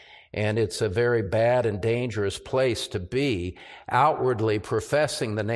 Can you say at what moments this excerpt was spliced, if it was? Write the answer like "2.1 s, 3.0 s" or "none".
none